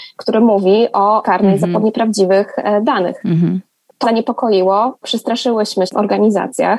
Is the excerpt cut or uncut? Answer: cut